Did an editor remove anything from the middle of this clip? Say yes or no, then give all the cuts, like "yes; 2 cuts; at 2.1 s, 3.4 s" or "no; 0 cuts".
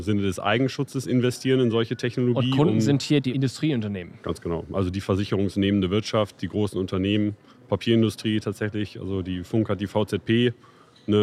no; 0 cuts